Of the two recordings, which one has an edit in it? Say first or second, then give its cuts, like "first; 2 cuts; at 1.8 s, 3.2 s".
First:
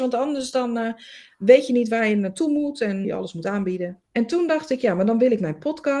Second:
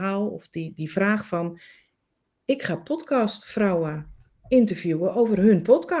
first; 2 cuts; at 3.0 s, 4.0 s